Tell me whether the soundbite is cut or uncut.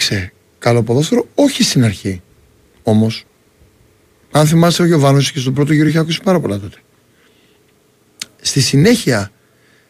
uncut